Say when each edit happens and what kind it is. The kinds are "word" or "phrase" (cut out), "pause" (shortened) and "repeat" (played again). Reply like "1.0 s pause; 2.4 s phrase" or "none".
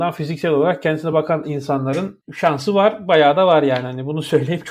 none